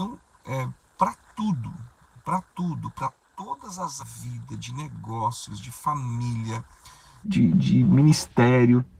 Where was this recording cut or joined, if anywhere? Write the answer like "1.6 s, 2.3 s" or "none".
4.0 s, 7.2 s